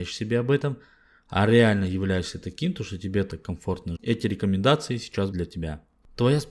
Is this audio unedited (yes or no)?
no